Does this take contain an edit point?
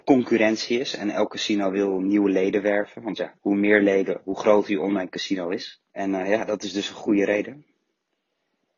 yes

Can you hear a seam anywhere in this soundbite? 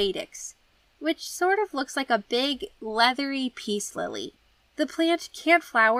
no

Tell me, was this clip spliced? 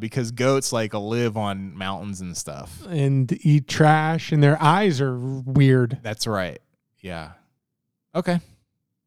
no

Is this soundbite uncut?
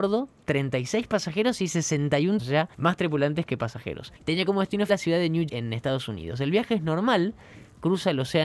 no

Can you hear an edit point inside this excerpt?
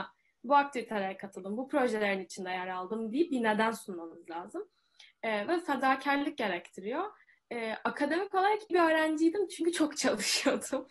yes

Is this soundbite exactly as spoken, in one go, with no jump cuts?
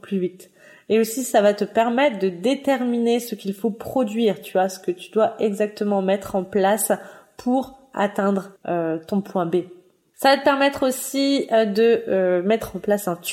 no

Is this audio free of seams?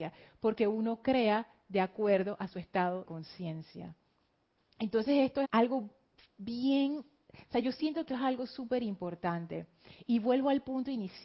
no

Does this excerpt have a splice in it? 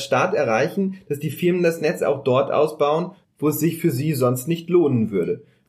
no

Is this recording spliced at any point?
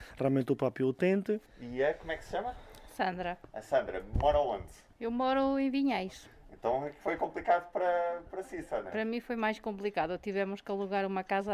no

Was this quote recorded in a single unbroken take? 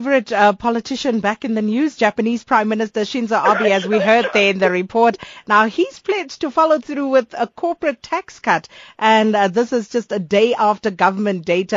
yes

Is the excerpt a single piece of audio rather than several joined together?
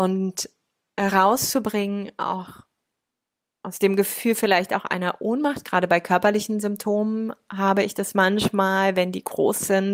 yes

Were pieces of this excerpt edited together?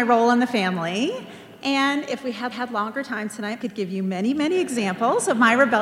yes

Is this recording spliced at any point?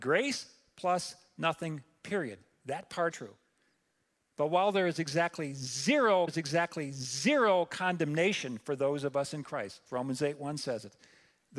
yes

